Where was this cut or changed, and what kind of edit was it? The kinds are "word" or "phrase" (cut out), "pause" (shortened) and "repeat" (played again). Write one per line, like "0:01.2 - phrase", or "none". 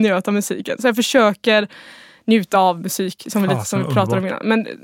none